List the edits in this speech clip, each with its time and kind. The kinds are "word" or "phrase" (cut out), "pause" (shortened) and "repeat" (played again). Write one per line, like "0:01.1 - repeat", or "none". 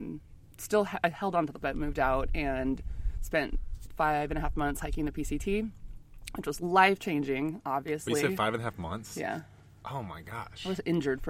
0:01.6 - word
0:07.6 - word